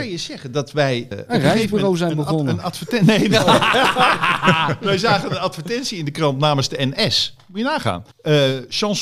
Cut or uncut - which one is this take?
cut